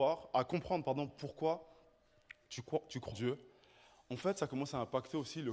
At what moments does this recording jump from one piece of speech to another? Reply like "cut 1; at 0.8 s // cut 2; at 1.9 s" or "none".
cut 1; at 3.1 s